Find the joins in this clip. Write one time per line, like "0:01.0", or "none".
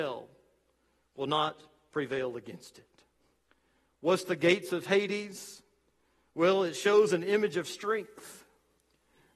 none